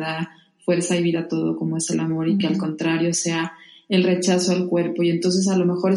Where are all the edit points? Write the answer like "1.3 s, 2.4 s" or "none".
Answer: none